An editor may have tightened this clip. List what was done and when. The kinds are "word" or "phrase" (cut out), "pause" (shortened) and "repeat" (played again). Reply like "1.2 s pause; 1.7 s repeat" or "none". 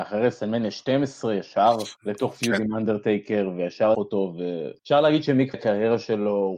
2.0 s pause; 3.9 s word; 4.8 s pause; 5.5 s word